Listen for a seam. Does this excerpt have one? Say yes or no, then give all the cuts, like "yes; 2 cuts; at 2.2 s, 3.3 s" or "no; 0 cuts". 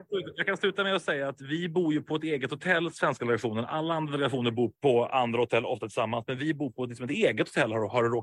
no; 0 cuts